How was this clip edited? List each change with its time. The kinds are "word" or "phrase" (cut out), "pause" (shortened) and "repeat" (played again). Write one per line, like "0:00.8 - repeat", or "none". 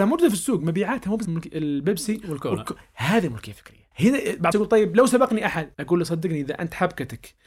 0:01.2 - word
0:03.9 - pause
0:04.5 - word
0:05.7 - pause

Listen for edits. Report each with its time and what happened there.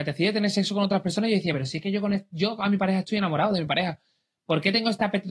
none

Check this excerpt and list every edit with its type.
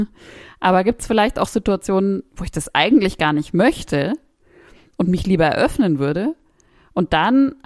none

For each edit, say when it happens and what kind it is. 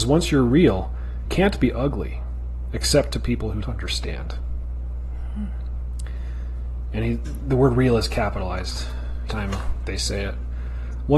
0:01.3 - word
0:03.6 - word
0:09.3 - word

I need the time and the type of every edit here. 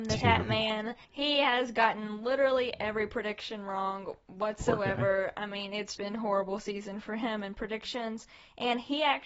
0:01.0 - pause
0:05.9 - word

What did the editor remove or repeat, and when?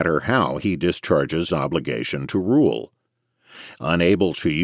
0:01.5 - word

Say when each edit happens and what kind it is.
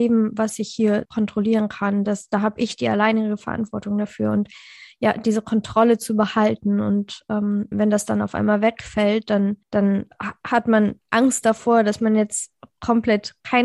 0:01.1 - word
0:07.7 - word
0:09.6 - pause
0:11.0 - pause

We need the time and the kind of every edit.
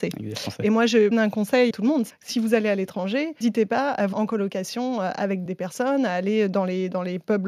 0:01.1 - word
0:01.7 - word
0:02.1 - word
0:03.4 - word
0:04.1 - word
0:05.5 - word

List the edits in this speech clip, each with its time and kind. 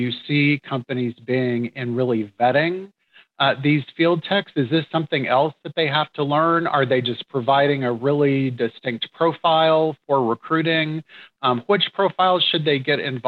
none

